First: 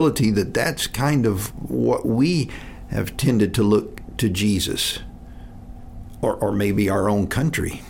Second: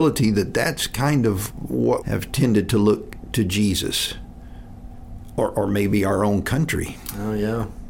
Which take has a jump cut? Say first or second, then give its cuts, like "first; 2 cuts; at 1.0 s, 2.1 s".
second; 1 cut; at 2.0 s